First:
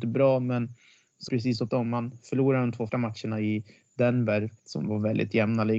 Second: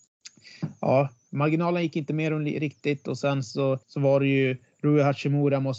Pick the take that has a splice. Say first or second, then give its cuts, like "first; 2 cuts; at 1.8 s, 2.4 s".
first; 4 cuts; at 1.3 s, 1.7 s, 2.9 s, 4.6 s